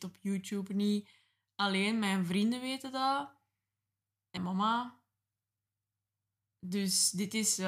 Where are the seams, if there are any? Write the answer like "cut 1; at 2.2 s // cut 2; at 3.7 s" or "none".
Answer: cut 1; at 4.4 s